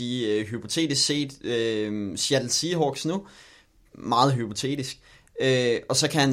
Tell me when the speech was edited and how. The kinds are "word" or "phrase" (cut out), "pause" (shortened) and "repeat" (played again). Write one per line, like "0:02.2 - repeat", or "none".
none